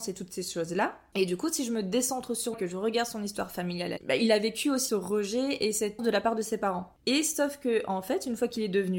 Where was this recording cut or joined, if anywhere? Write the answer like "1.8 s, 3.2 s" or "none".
2.5 s, 4.0 s, 4.9 s, 6.0 s